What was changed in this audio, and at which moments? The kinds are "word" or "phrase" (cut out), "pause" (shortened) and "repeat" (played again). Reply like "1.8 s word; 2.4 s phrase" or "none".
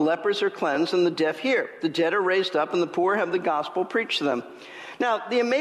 none